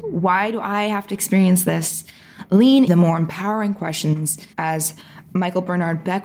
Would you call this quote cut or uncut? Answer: cut